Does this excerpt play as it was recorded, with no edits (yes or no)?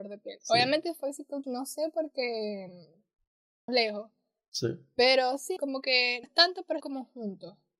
no